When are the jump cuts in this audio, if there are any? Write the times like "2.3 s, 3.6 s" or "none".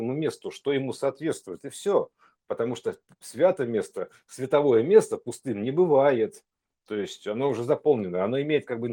none